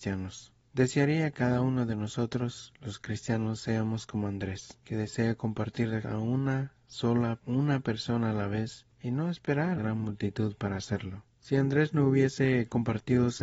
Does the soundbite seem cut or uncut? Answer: cut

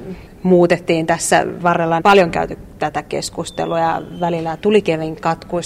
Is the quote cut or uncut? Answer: cut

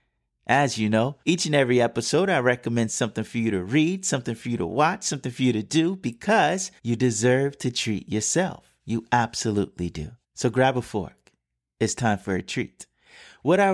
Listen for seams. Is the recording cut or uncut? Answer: cut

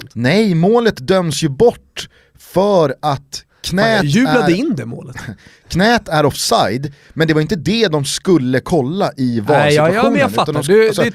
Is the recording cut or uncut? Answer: uncut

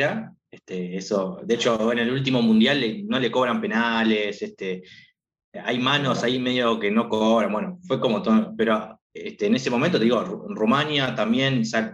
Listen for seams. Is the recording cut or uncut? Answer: cut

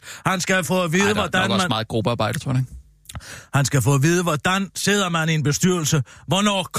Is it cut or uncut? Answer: uncut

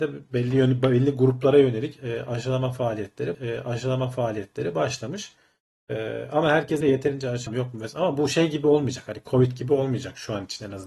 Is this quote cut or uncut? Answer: cut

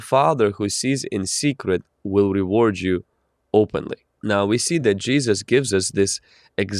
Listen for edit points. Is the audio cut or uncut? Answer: uncut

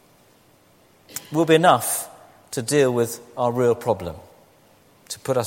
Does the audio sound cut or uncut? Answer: uncut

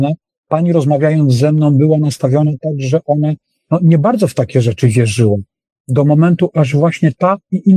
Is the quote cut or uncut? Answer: uncut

